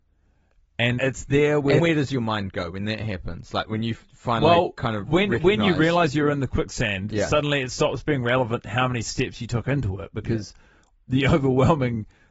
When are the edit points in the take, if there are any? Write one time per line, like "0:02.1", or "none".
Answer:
0:01.0
0:01.8